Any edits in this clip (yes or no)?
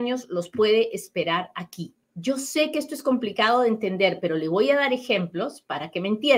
yes